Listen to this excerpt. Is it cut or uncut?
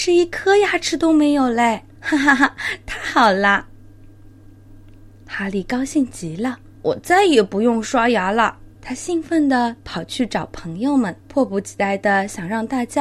cut